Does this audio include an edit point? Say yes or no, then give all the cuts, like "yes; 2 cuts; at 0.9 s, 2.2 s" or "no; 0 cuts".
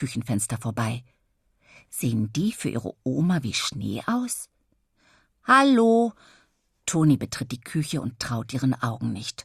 no; 0 cuts